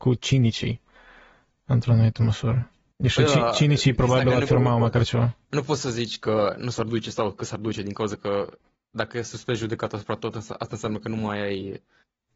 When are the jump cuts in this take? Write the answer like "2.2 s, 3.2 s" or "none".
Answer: 2.9 s, 5.4 s